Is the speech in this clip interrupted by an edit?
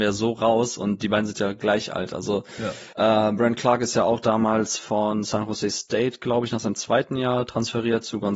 no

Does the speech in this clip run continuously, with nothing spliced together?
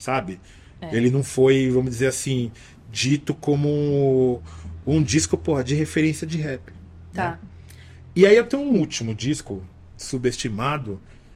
yes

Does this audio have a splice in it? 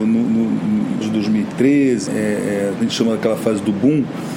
yes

